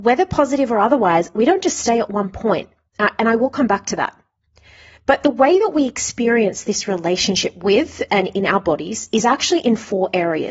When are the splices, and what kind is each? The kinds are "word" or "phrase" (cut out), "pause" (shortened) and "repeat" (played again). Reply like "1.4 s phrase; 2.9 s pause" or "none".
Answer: none